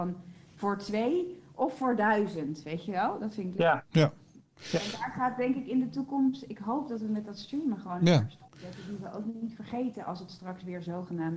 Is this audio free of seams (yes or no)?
no